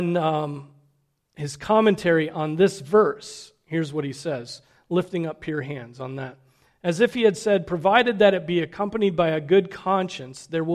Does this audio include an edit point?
no; 0 cuts

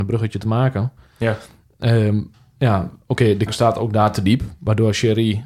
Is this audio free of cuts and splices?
no; 1 cut; at 3.5 s

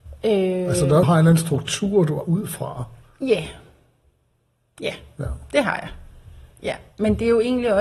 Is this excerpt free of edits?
no; 2 cuts; at 1.0 s, 2.2 s

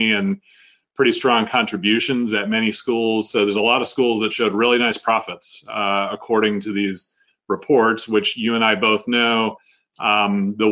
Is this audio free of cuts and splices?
yes; 0 cuts

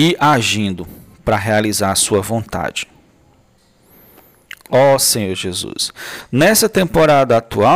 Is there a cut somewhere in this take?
no; 0 cuts

